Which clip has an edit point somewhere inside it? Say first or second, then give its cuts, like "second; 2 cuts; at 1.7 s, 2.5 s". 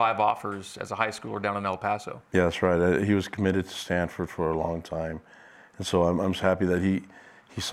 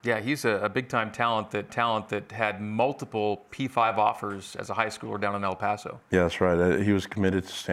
second; 1 cut; at 1.7 s